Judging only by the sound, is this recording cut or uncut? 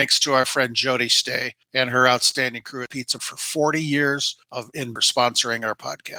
cut